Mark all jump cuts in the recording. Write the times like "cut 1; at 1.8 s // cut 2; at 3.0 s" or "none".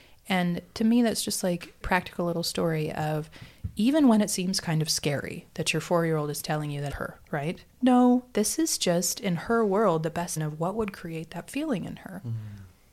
cut 1; at 1.8 s // cut 2; at 6.9 s // cut 3; at 7.7 s // cut 4; at 10.4 s